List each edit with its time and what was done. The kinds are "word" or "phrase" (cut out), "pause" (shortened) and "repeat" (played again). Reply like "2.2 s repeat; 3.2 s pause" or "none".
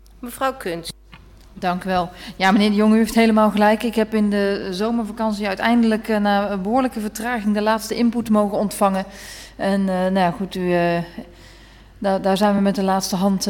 none